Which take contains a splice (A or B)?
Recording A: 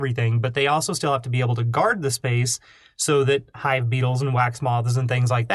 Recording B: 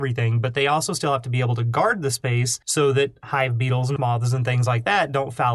B